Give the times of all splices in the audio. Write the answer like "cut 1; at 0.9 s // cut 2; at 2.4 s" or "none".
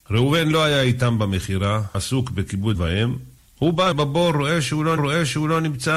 cut 1; at 1.9 s // cut 2; at 2.7 s // cut 3; at 3.4 s // cut 4; at 3.9 s // cut 5; at 5.0 s